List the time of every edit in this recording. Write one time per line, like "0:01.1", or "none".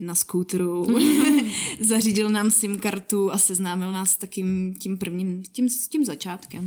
none